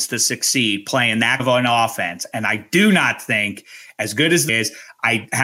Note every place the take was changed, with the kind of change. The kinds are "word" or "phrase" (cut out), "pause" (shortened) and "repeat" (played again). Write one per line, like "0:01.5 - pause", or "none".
0:01.4 - word
0:04.5 - word